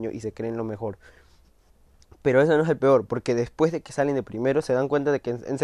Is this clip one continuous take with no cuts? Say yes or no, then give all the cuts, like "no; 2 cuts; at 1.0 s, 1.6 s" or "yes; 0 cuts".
yes; 0 cuts